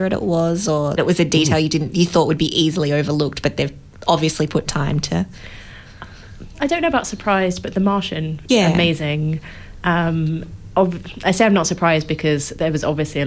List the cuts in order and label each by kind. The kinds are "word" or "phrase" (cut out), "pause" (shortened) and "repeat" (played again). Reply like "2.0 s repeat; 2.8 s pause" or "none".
1.0 s word; 6.5 s word; 8.5 s word